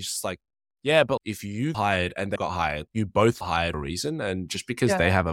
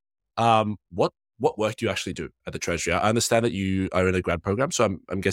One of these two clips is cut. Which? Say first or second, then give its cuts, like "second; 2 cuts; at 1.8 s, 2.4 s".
first; 6 cuts; at 1.2 s, 1.7 s, 2.4 s, 2.9 s, 3.4 s, 3.7 s